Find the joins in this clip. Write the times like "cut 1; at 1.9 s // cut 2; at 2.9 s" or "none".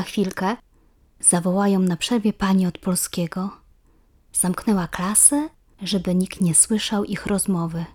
none